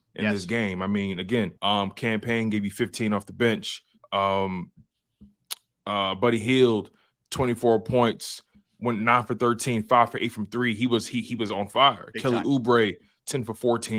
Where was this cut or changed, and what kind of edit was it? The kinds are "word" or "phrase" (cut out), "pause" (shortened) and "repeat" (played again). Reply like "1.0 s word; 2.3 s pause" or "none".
1.6 s pause; 4.0 s pause